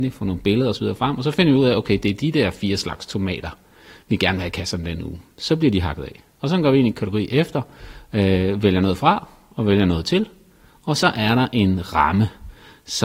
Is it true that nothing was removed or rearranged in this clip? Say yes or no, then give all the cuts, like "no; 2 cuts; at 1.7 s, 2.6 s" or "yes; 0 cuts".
no; 1 cut; at 6.9 s